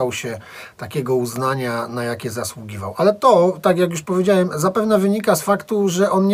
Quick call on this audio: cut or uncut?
uncut